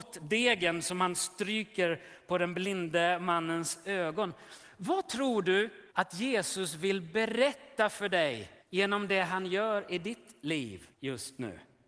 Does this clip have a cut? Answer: yes; 3 cuts; at 5.9 s, 8.6 s, 10.9 s

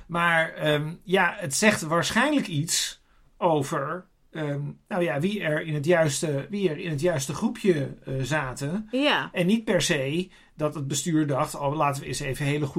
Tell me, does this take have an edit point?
no; 0 cuts

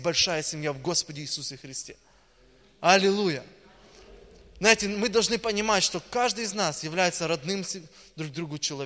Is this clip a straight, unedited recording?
yes; 0 cuts

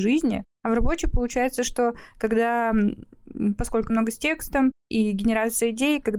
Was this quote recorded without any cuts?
no; 1 cut; at 3.9 s

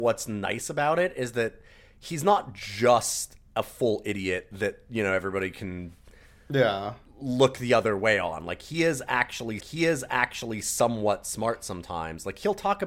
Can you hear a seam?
yes; 1 cut; at 9.6 s

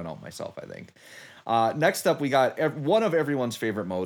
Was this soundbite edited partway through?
no; 0 cuts

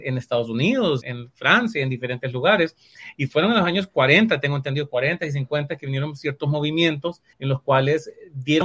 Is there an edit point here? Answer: yes; 2 cuts; at 1.0 s, 7.3 s

